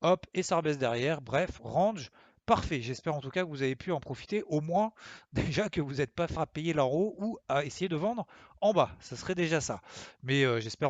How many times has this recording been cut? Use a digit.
1